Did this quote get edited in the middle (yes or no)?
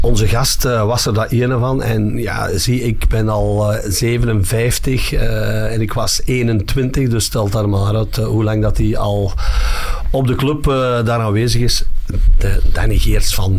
no